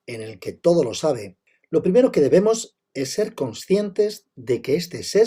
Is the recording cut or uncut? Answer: uncut